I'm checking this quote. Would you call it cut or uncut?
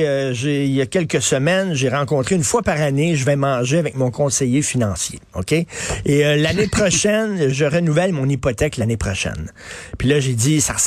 cut